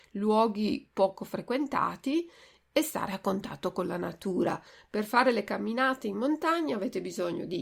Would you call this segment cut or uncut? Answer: uncut